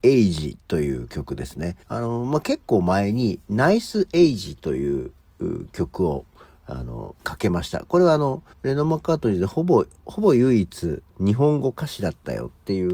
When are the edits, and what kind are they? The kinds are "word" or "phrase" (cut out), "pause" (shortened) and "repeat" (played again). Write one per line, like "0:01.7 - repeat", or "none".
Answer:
0:01.8 - pause
0:07.2 - pause
0:08.5 - pause
0:11.1 - pause